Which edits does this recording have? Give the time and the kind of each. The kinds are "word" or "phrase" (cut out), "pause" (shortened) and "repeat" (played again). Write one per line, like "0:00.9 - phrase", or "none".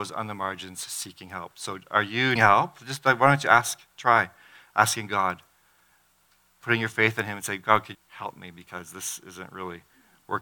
0:02.4 - word
0:07.9 - word